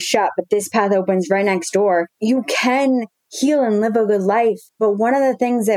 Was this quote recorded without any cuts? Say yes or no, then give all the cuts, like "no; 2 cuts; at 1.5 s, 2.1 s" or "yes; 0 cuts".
no; 2 cuts; at 2.1 s, 4.7 s